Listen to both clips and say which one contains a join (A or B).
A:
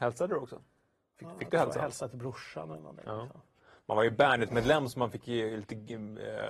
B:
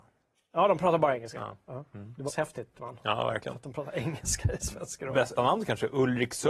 B